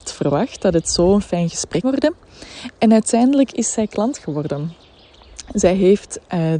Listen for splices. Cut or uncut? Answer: cut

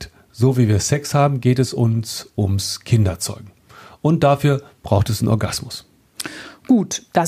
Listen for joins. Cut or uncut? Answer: uncut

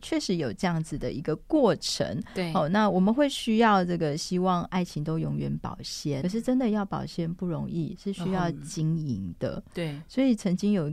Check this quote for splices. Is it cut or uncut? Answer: cut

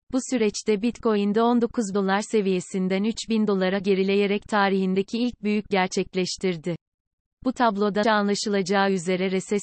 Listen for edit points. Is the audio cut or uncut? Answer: cut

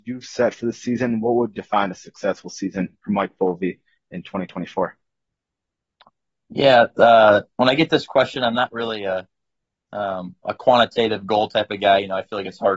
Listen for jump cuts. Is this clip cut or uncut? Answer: uncut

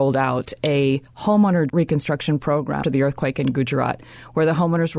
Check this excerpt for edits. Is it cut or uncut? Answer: cut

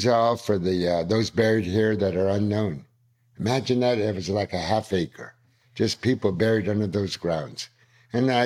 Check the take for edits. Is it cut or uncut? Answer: uncut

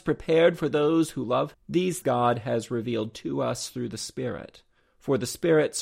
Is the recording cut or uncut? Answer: cut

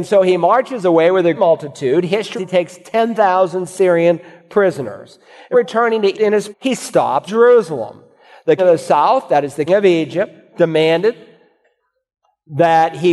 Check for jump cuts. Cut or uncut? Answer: cut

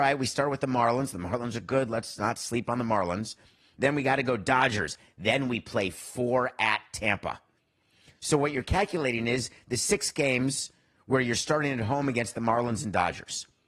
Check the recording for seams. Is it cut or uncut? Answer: uncut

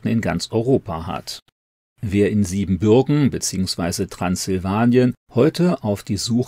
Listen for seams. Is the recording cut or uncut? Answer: uncut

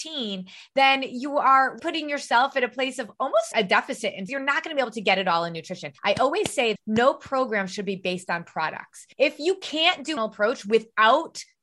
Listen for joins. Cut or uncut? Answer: cut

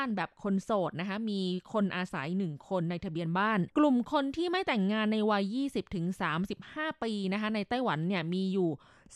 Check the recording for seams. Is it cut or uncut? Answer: cut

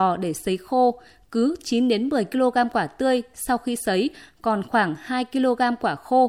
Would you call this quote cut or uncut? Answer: uncut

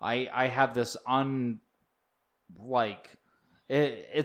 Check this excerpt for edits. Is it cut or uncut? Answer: uncut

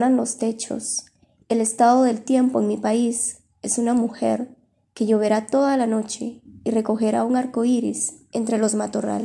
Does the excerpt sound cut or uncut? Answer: uncut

